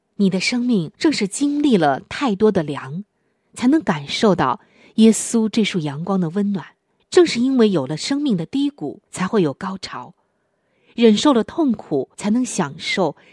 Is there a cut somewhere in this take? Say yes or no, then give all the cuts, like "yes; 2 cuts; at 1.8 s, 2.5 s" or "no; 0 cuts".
yes; 5 cuts; at 0.9 s, 3.3 s, 7.0 s, 9.1 s, 12.1 s